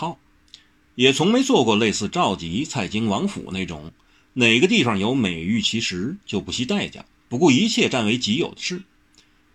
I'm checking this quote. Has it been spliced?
no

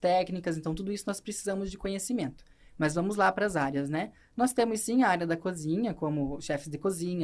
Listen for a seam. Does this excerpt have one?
no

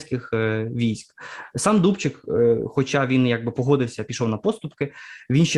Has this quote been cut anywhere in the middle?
no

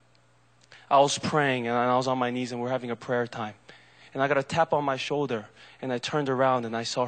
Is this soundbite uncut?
yes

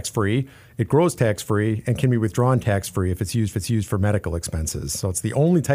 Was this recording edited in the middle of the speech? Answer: yes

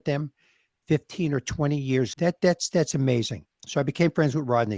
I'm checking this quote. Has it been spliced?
yes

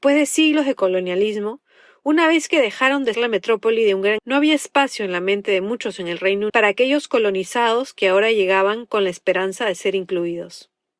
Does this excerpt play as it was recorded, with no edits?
no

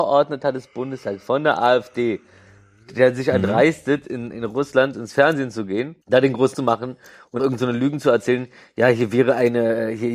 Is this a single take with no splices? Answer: no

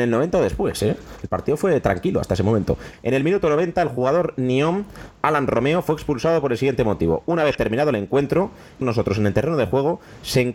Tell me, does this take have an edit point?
yes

